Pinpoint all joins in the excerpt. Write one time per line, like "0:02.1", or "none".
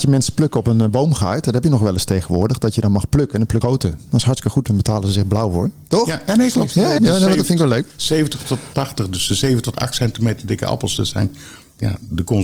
0:03.6
0:07.0